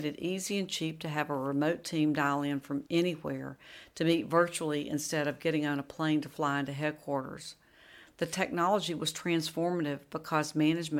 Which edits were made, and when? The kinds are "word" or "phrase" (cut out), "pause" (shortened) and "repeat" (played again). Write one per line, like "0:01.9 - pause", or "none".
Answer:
0:02.9 - pause

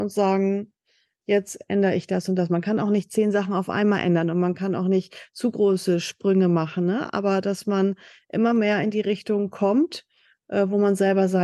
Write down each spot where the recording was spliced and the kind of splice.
none

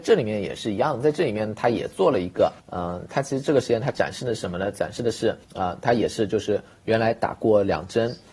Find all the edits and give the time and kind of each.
0:02.6 - pause
0:05.4 - pause

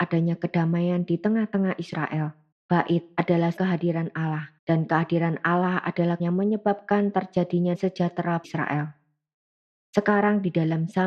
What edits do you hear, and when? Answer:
0:02.5 - pause
0:03.6 - word
0:04.6 - pause
0:06.2 - word
0:07.7 - word
0:08.4 - word

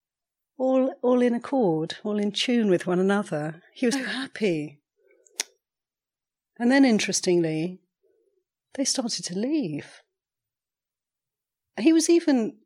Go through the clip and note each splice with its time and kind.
0:03.9 - word

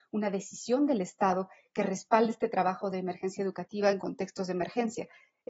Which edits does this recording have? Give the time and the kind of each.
none

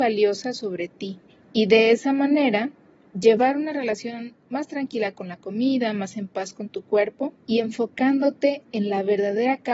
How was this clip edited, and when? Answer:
0:01.3 - pause
0:03.0 - pause
0:07.4 - pause

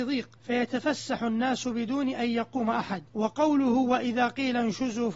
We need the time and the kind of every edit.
none

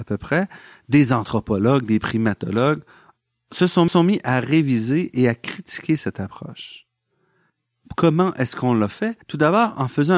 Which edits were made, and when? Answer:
0:03.9 - repeat
0:09.2 - pause

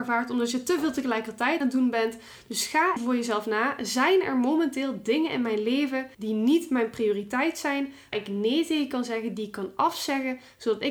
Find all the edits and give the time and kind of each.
0:01.6 - word
0:03.0 - word
0:06.1 - pause
0:08.1 - word

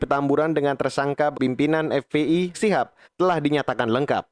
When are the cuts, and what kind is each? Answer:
0:01.3 - word
0:02.5 - word
0:03.0 - pause

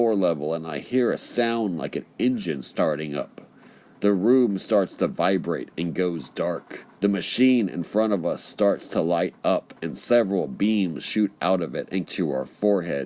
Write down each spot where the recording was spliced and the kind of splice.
0:06.9 - pause
0:12.1 - word

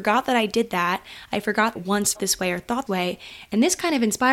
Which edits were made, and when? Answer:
0:01.7 - phrase
0:02.1 - word
0:02.9 - word

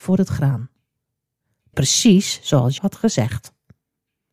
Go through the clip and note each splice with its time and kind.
0:01.7 - phrase
0:02.8 - word

